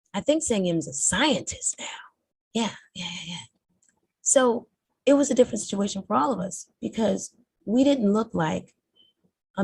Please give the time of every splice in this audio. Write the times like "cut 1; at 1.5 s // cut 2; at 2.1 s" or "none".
cut 1; at 2.3 s // cut 2; at 6.7 s